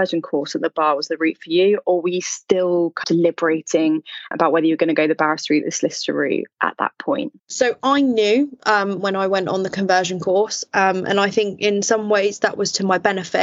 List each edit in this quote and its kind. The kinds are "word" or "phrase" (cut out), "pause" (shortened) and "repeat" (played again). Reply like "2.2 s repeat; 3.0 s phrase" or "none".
3.0 s word; 4.3 s word; 7.4 s pause

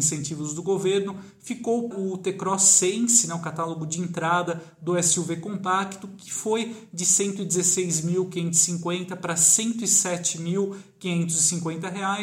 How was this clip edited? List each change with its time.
1.9 s word

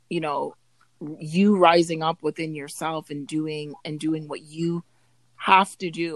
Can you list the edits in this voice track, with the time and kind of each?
none

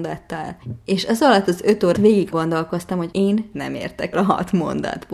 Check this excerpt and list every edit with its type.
1.9 s word; 2.3 s word; 3.5 s word; 4.1 s word

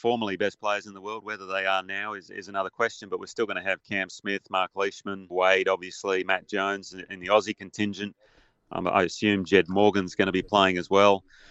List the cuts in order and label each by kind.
5.3 s word

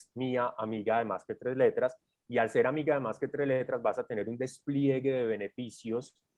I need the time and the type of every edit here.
none

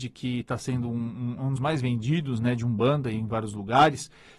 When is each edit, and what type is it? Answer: 1.6 s phrase

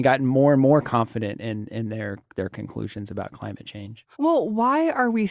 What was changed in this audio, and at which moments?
4.1 s pause

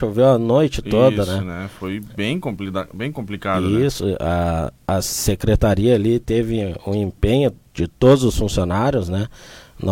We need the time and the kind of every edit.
none

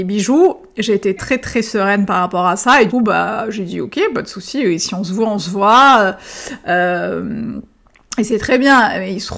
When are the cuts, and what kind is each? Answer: 1.2 s word; 2.9 s word

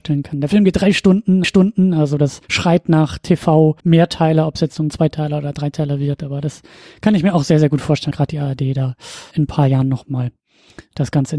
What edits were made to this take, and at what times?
1.4 s repeat; 2.4 s pause; 3.8 s pause; 8.1 s word; 9.3 s word

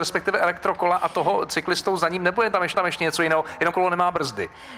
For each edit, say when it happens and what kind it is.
2.7 s repeat; 3.7 s phrase

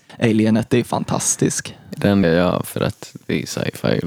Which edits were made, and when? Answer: 2.2 s word

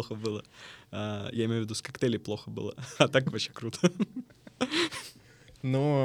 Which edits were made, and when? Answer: none

